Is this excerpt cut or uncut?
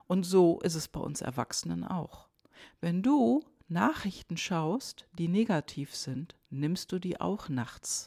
cut